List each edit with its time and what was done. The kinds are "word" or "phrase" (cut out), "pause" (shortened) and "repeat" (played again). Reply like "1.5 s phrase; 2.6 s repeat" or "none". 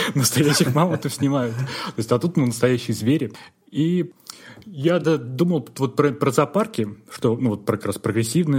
none